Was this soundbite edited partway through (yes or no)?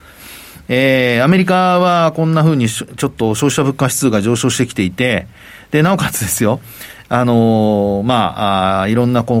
no